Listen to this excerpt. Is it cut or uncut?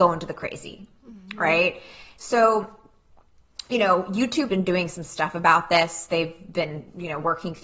cut